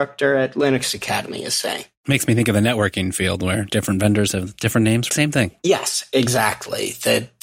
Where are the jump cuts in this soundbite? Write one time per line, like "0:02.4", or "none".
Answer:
0:05.1